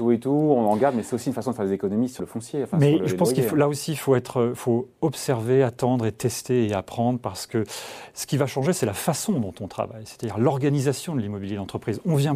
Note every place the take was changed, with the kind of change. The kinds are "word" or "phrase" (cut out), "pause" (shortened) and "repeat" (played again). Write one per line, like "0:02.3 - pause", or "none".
0:02.2 - word
0:04.6 - word